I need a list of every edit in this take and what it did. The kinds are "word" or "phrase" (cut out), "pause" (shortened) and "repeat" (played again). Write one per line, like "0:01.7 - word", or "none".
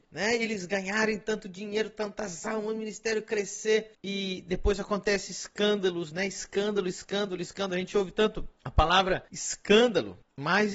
none